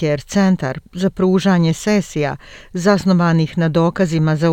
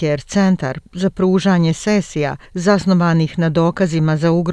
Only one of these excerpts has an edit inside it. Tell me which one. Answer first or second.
second